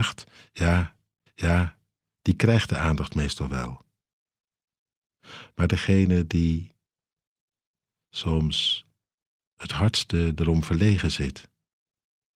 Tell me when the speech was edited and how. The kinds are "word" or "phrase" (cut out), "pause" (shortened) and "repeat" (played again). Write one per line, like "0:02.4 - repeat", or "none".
0:01.3 - repeat